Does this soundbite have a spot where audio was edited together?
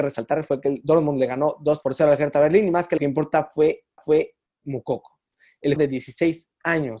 yes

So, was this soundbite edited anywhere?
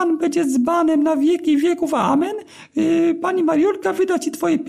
no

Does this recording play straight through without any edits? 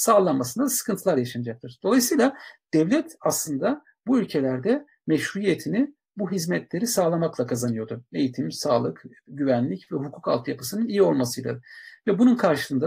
yes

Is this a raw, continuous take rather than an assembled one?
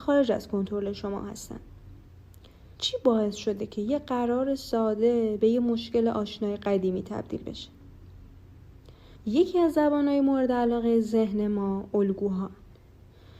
no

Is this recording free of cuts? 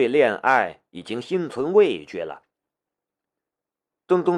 yes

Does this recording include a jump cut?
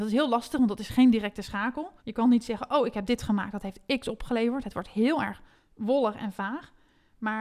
yes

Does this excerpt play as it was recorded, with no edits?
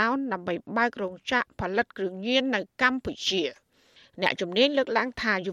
yes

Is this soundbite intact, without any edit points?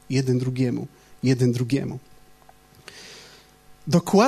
yes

